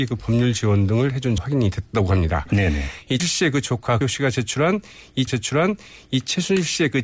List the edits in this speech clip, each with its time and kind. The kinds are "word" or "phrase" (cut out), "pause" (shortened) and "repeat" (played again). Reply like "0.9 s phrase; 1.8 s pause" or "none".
1.4 s word; 3.2 s word; 4.0 s phrase; 5.3 s repeat